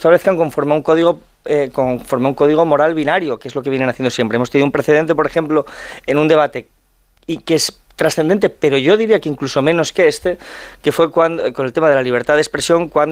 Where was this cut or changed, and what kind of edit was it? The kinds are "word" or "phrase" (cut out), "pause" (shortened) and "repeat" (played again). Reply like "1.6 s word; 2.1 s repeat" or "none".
none